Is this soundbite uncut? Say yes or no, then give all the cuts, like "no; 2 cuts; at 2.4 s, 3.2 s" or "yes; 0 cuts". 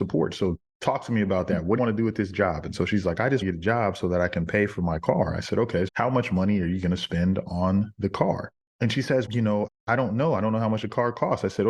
no; 4 cuts; at 1.8 s, 3.4 s, 5.9 s, 9.3 s